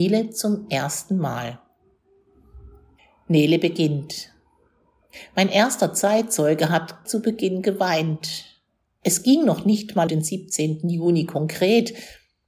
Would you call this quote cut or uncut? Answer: cut